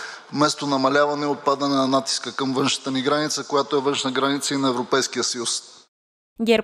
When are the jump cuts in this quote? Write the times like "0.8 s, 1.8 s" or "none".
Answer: none